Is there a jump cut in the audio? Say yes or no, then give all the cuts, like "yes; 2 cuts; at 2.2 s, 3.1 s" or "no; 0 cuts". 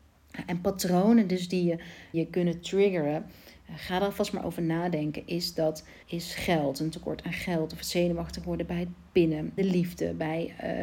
yes; 3 cuts; at 2.1 s, 6.0 s, 9.6 s